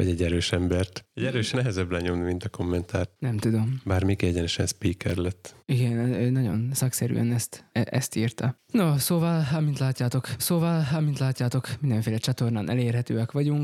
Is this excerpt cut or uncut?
cut